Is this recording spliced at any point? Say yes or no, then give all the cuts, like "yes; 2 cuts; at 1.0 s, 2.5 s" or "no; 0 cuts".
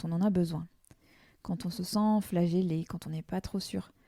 no; 0 cuts